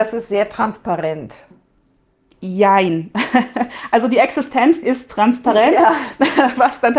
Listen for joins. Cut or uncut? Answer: cut